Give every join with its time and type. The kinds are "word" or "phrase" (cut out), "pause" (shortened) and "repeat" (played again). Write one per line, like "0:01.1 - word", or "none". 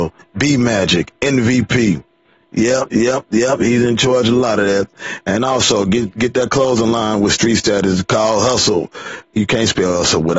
none